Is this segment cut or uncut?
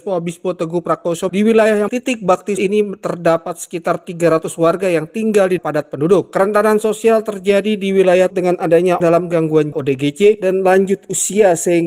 cut